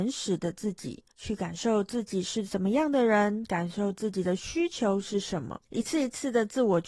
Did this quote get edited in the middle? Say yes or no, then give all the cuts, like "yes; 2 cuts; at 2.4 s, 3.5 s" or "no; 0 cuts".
yes; 2 cuts; at 1.1 s, 5.7 s